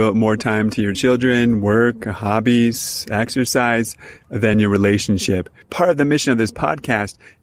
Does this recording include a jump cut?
no; 0 cuts

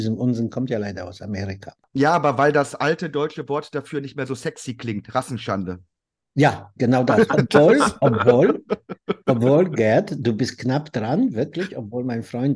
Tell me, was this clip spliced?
no; 0 cuts

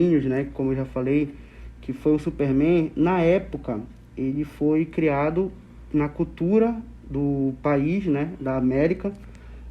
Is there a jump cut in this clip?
no; 0 cuts

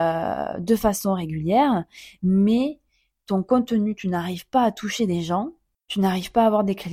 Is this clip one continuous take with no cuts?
yes; 0 cuts

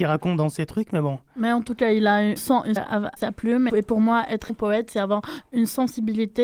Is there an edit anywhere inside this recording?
yes; 5 cuts; at 2.4 s, 2.8 s, 3.2 s, 3.7 s, 4.5 s

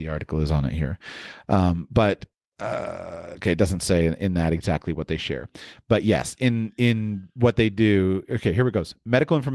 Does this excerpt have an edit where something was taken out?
no; 0 cuts

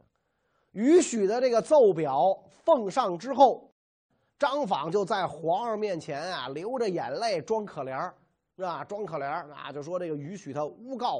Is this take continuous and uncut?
yes; 0 cuts

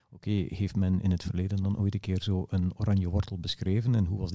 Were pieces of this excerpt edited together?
no; 0 cuts

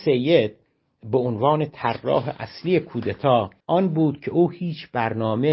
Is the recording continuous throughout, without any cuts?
no; 1 cut; at 3.6 s

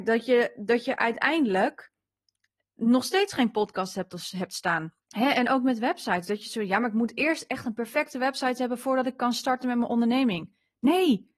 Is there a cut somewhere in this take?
yes; 1 cut; at 5.0 s

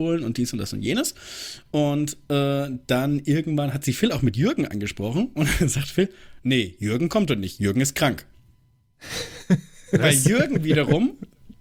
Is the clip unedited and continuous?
yes; 0 cuts

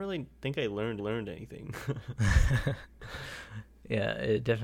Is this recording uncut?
no; 1 cut; at 1.0 s

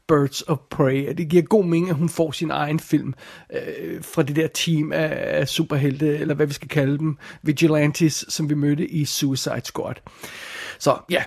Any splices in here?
no; 0 cuts

